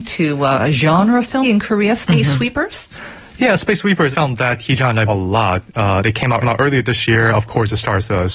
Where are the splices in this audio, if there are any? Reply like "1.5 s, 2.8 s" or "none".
1.4 s, 4.1 s, 5.1 s, 6.4 s